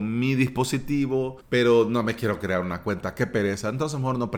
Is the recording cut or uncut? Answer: cut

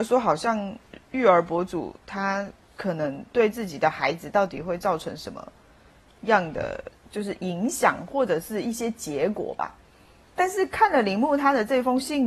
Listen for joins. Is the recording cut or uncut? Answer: uncut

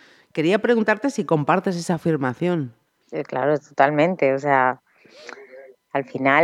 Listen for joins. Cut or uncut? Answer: uncut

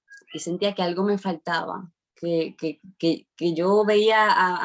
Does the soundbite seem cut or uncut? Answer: uncut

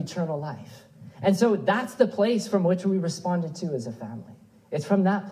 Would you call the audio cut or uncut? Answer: uncut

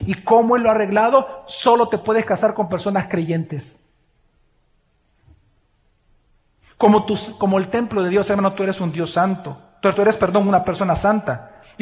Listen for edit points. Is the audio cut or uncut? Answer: cut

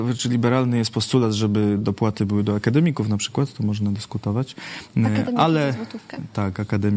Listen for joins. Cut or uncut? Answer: uncut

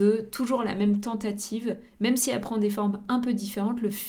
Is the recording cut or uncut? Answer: uncut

